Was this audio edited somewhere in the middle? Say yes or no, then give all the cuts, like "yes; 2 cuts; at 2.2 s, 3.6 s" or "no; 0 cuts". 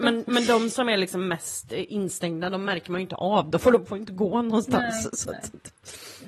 no; 0 cuts